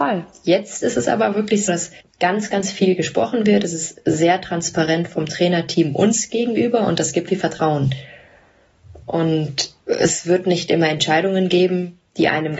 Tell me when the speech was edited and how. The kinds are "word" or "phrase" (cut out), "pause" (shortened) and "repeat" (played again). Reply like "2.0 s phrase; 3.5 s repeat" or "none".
1.7 s word; 2.0 s pause; 7.3 s phrase; 9.8 s pause